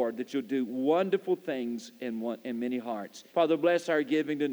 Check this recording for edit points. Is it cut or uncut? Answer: cut